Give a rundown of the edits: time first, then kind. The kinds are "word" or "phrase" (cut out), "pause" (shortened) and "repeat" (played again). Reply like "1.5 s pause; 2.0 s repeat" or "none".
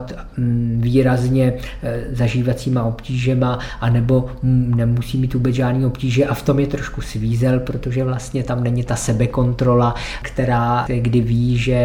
none